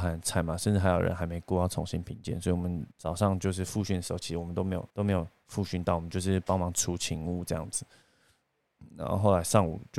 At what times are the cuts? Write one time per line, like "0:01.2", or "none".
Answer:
0:02.9
0:04.9